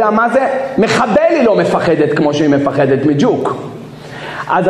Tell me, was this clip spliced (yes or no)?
no